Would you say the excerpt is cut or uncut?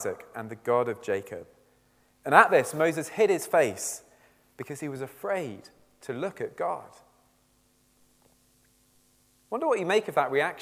uncut